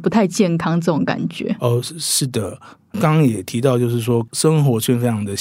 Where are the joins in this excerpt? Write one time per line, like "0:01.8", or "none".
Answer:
none